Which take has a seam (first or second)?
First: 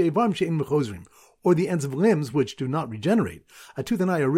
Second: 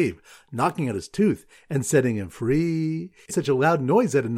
second